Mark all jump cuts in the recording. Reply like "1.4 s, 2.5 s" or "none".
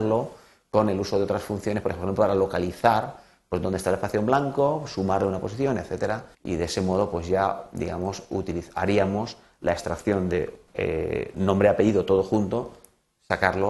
6.3 s, 10.7 s